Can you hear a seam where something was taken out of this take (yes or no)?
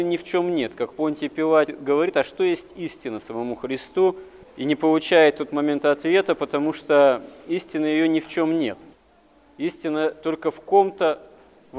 no